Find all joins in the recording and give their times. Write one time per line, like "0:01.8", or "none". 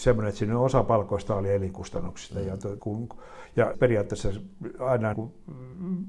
0:01.3
0:02.8
0:03.7
0:05.1